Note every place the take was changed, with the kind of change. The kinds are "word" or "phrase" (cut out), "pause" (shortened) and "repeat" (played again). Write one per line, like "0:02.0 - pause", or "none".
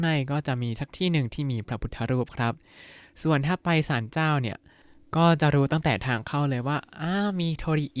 none